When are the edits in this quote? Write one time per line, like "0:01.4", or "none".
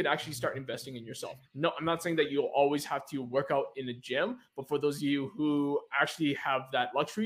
0:01.5